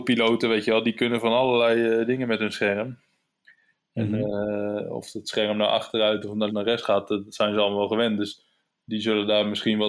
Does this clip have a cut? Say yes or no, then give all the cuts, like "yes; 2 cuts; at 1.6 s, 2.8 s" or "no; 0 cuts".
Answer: yes; 1 cut; at 6.5 s